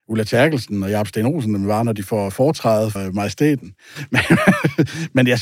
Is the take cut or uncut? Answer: cut